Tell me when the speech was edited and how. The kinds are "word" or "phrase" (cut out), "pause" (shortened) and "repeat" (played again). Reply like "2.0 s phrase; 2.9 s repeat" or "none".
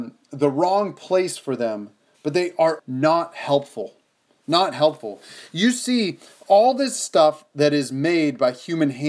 2.8 s word